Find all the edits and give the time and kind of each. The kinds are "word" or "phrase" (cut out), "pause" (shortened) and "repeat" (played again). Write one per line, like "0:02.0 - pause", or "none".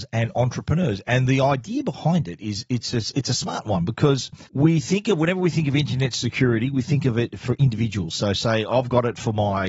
0:04.5 - pause